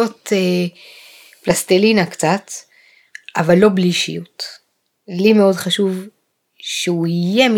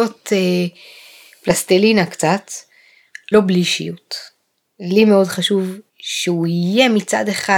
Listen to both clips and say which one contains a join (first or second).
second